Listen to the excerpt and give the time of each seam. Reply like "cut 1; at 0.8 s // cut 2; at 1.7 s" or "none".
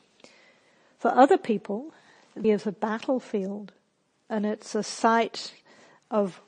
cut 1; at 2.4 s